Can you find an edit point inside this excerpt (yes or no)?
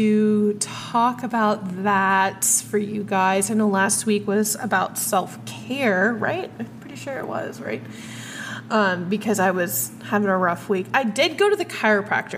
no